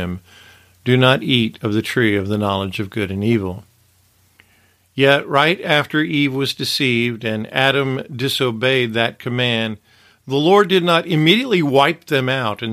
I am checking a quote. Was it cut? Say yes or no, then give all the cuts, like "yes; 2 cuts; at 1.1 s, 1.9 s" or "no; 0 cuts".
no; 0 cuts